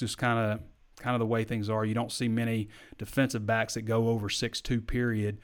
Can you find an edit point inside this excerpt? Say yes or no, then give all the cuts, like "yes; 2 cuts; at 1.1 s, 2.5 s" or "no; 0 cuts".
no; 0 cuts